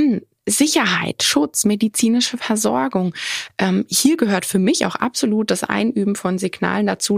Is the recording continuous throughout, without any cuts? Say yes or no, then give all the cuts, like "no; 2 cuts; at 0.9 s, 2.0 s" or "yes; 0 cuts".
yes; 0 cuts